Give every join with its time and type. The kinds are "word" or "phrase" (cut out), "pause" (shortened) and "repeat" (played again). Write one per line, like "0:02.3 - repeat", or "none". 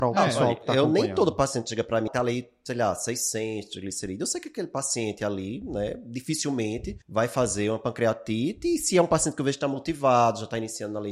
0:02.1 - word
0:07.0 - pause